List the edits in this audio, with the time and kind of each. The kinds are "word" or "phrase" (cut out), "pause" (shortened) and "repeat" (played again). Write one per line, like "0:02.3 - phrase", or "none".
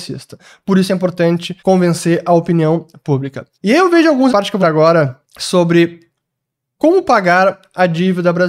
0:01.6 - pause
0:03.5 - pause
0:04.3 - phrase
0:04.6 - word
0:05.2 - pause